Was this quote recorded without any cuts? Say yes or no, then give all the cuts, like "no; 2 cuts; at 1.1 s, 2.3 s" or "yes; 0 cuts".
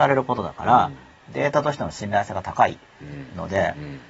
yes; 0 cuts